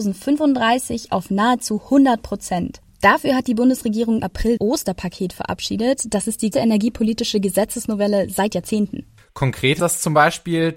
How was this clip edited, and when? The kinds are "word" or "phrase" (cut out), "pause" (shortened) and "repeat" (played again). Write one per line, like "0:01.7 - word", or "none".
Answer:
0:04.2 - word
0:04.6 - word
0:06.5 - word
0:09.8 - word